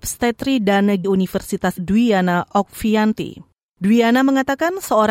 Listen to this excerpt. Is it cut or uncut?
cut